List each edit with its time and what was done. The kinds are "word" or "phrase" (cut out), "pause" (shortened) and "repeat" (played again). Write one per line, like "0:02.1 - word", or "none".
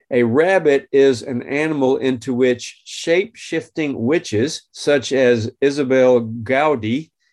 0:04.7 - pause